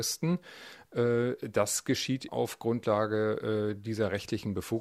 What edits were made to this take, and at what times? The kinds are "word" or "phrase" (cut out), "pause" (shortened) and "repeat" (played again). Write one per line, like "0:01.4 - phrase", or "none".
0:02.3 - word